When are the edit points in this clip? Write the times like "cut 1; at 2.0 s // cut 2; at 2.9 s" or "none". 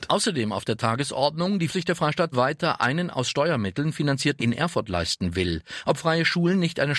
cut 1; at 1.7 s // cut 2; at 2.3 s // cut 3; at 4.4 s